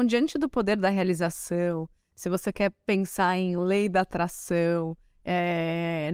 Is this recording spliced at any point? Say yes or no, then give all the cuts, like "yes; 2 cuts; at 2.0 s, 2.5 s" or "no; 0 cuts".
no; 0 cuts